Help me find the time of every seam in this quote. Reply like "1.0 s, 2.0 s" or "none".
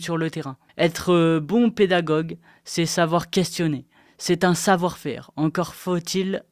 none